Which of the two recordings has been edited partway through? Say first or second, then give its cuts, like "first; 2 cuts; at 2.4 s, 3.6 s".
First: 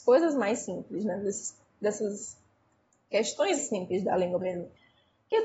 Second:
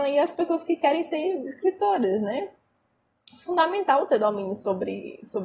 first; 2 cuts; at 3.6 s, 4.4 s